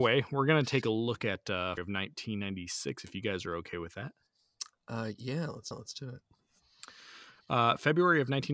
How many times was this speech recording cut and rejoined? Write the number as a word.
two